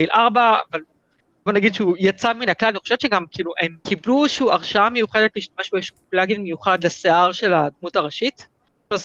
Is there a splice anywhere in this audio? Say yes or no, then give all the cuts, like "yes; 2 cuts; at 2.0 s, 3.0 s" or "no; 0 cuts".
yes; 1 cut; at 3.8 s